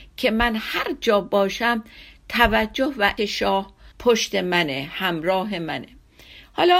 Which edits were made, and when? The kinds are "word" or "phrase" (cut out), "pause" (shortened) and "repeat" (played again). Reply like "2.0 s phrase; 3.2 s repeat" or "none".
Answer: 3.2 s word; 3.9 s pause